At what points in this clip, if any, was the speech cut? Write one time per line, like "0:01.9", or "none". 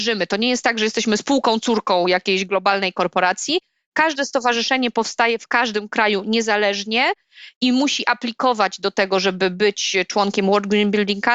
none